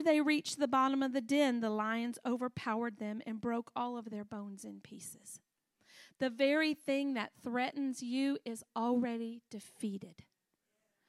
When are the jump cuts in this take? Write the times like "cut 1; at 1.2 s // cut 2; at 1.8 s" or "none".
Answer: none